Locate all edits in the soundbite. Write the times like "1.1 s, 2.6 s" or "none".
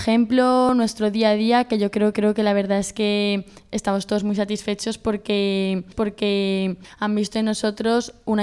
2.1 s, 5.9 s